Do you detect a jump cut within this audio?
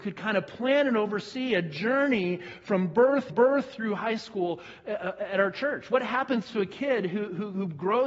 yes; 1 cut; at 3.3 s

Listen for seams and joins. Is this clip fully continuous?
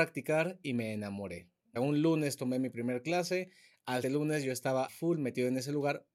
no; 3 cuts; at 1.8 s, 4.0 s, 4.9 s

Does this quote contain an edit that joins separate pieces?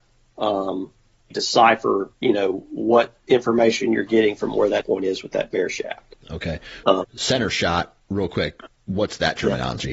yes; 4 cuts; at 1.3 s, 2.1 s, 4.8 s, 6.8 s

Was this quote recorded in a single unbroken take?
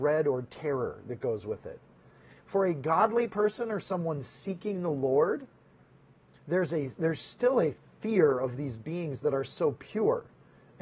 yes; 0 cuts

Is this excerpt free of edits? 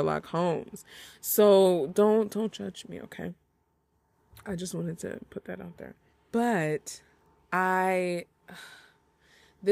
no; 1 cut; at 6.1 s

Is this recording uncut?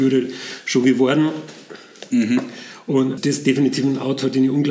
no; 1 cut; at 3.2 s

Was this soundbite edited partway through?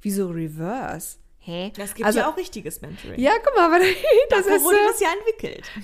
no; 0 cuts

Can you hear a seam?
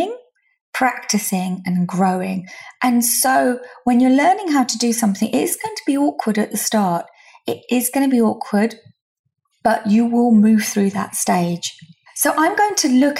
no; 0 cuts

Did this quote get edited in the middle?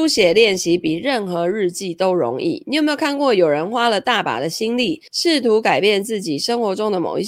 yes; 1 cut; at 5.1 s

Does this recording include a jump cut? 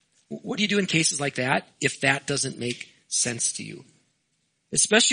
no; 0 cuts

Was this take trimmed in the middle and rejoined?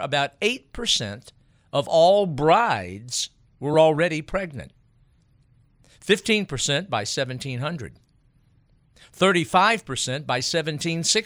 no; 0 cuts

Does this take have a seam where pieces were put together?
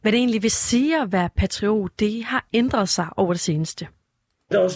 no; 0 cuts

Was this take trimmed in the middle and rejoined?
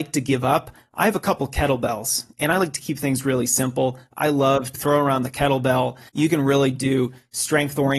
yes; 2 cuts; at 4.7 s, 6.1 s

